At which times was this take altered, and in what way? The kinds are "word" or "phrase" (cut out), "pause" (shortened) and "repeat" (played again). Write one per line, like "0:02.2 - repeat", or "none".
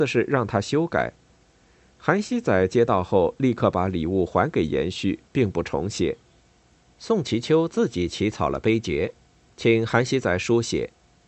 0:06.4 - pause